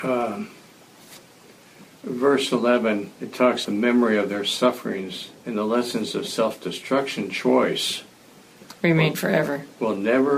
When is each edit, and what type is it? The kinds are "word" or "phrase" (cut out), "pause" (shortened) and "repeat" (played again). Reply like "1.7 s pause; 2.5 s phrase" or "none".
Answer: 3.1 s pause; 3.6 s word; 5.4 s pause

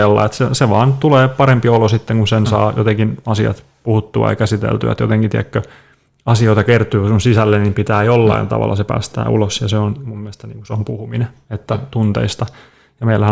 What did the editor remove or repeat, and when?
none

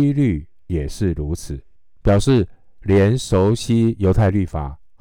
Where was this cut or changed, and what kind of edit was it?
1.8 s pause

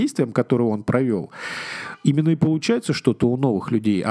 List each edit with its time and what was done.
none

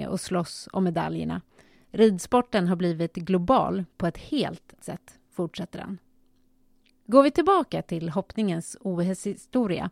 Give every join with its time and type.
4.8 s word

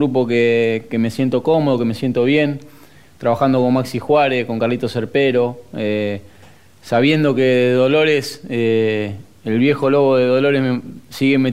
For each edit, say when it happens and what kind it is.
none

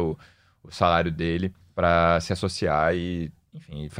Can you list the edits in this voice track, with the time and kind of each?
1.6 s pause

